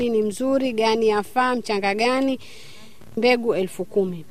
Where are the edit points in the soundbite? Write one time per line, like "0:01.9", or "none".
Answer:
0:03.2